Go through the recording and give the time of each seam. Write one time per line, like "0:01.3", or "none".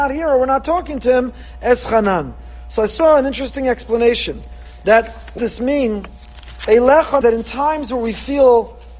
0:05.4
0:07.2